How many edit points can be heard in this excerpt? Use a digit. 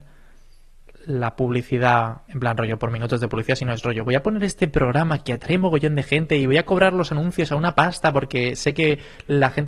1